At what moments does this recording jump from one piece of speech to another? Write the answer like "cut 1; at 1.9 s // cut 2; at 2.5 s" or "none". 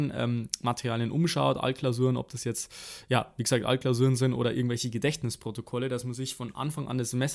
none